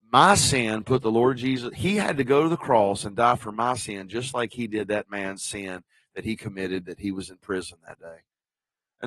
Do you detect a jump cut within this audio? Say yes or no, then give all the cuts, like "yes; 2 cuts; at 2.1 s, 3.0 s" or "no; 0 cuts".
no; 0 cuts